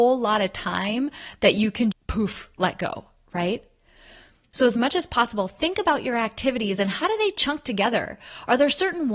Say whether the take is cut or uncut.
cut